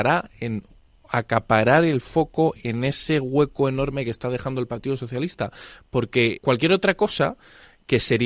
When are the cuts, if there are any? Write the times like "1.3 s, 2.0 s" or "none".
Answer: 6.4 s